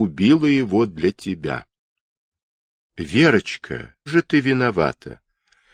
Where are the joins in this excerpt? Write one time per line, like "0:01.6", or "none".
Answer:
0:04.1